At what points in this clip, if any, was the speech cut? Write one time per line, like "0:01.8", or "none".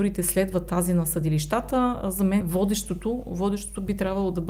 0:02.4